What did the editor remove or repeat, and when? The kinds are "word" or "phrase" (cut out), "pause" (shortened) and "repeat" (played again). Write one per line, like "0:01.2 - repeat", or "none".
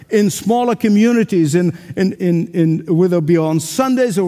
0:02.1 - word